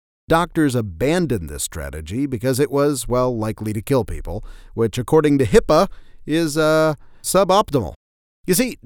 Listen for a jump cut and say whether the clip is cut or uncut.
uncut